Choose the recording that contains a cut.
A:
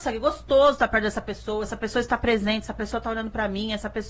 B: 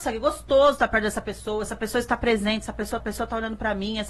B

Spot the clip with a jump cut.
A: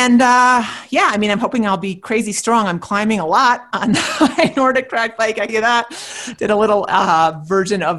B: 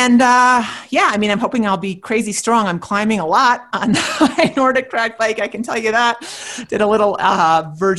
A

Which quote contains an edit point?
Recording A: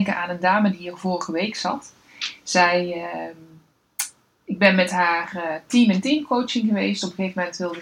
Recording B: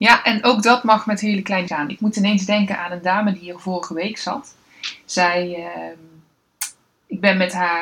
B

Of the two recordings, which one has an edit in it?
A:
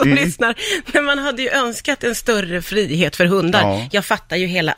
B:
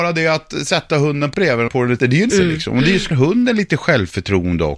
B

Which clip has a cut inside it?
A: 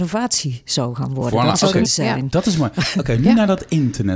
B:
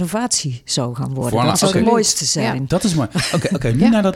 A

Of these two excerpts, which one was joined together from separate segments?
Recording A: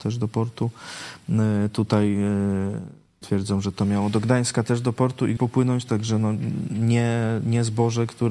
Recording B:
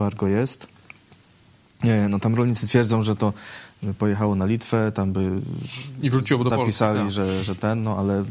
A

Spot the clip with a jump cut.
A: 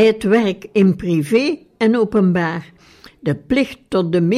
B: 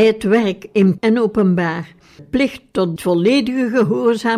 B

